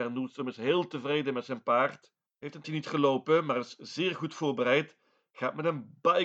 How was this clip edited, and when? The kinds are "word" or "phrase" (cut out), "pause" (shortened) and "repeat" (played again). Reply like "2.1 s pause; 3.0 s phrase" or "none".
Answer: 2.6 s word

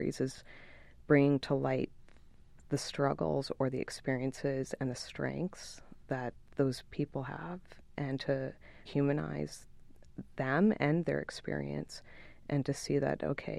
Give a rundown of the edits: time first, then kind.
8.9 s word

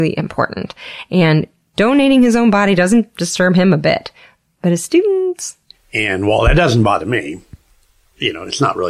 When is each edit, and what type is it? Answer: none

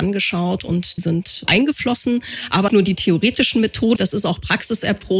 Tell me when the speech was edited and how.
1.0 s word; 2.7 s word; 4.0 s word

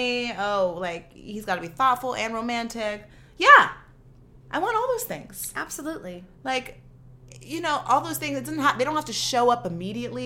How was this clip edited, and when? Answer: none

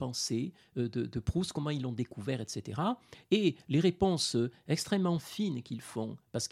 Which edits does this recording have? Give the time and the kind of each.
none

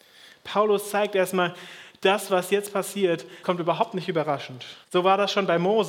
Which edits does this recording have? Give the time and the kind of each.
3.4 s word; 4.8 s pause

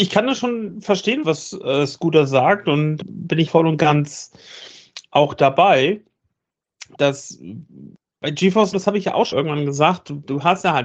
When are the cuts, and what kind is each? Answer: 1.2 s word; 3.0 s word; 3.5 s word; 6.9 s word; 8.7 s word; 9.3 s word

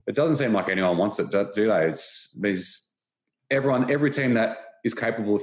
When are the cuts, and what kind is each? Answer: none

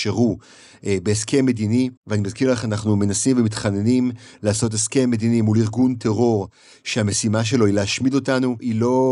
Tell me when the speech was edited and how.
2.0 s pause

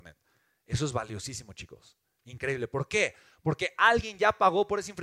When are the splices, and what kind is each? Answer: none

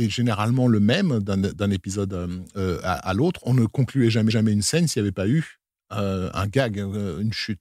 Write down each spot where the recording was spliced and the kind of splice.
4.3 s repeat; 6.3 s word

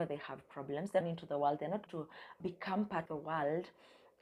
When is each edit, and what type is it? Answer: 1.0 s phrase; 1.9 s word; 2.4 s word; 3.1 s word

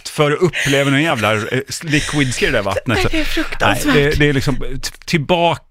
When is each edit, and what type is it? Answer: 2.4 s word

